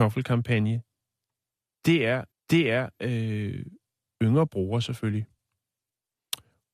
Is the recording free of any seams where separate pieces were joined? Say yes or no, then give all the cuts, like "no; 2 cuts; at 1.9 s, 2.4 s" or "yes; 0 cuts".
no; 1 cut; at 2.3 s